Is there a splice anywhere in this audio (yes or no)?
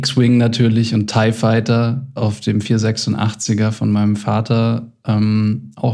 no